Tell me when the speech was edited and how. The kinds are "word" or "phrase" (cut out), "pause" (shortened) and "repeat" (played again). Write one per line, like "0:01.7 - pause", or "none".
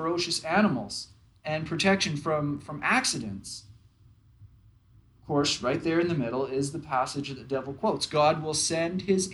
none